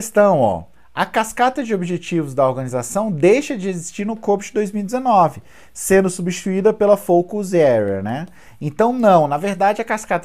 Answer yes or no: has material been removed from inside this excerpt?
no